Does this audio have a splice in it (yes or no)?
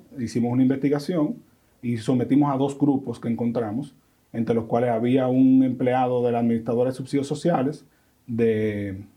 no